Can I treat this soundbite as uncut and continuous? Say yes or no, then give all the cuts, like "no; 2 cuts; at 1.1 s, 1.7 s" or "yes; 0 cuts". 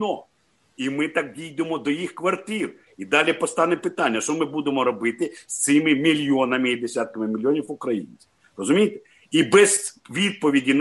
yes; 0 cuts